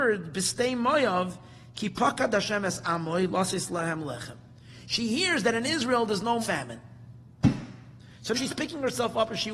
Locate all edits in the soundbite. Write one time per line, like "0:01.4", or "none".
0:06.4
0:08.3